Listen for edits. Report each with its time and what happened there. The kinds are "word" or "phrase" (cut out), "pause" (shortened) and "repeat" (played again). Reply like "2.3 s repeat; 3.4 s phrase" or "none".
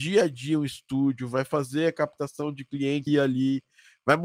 3.1 s word